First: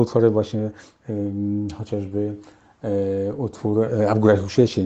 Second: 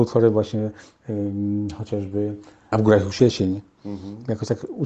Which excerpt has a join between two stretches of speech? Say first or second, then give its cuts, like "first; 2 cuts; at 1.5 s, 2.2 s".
second; 1 cut; at 2.7 s